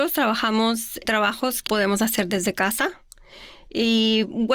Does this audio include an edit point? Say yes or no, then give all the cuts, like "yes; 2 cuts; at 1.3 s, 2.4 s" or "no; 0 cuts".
yes; 2 cuts; at 1.0 s, 1.7 s